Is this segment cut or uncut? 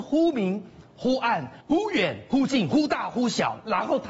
cut